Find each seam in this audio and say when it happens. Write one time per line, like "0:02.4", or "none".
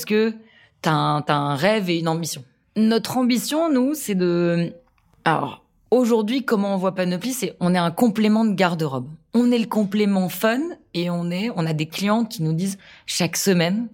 none